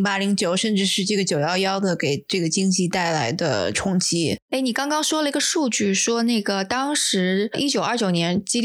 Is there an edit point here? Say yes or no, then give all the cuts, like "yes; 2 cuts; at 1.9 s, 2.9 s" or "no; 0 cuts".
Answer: yes; 1 cut; at 4.4 s